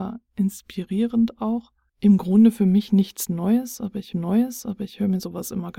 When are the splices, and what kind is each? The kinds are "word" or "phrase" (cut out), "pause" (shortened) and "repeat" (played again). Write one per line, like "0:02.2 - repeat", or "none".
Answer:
0:04.1 - repeat